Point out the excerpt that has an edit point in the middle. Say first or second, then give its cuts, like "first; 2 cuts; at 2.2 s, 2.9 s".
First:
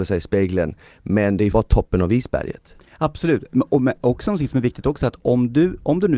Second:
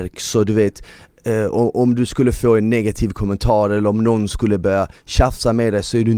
first; 1 cut; at 1.5 s